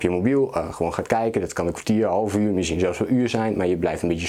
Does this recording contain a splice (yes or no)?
no